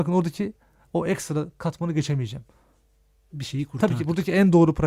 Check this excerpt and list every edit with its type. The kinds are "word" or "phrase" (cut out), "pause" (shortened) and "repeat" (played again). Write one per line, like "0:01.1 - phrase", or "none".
none